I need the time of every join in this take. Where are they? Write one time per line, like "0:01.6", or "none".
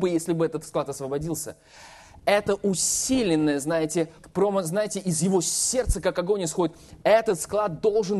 0:04.2